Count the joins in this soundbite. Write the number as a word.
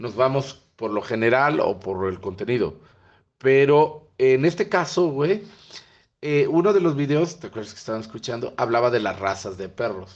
zero